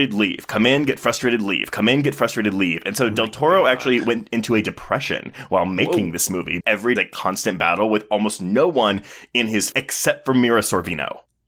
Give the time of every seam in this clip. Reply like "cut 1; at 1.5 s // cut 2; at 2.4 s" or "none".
cut 1; at 6.6 s // cut 2; at 7.0 s // cut 3; at 9.7 s